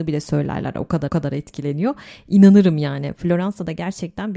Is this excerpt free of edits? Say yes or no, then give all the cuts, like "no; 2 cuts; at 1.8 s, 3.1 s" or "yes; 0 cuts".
no; 1 cut; at 1.1 s